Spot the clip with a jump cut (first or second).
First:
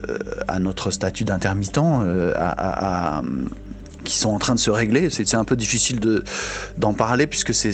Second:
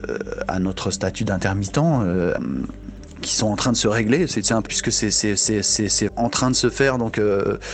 second